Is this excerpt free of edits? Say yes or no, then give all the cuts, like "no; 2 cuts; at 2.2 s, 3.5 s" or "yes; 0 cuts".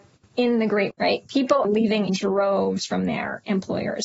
no; 3 cuts; at 0.9 s, 1.6 s, 2.1 s